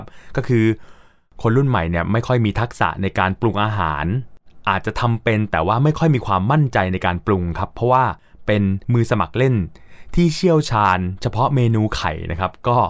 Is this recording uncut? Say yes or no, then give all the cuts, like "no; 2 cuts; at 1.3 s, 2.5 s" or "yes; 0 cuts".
yes; 0 cuts